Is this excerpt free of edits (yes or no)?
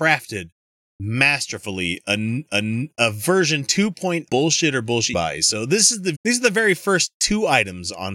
no